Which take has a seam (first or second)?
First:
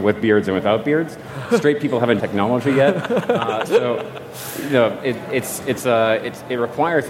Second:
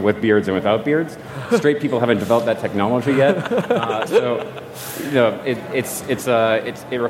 first